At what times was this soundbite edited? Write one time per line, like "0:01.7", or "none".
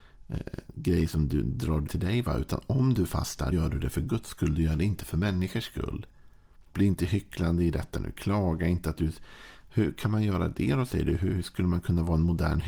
0:01.9
0:03.5
0:06.7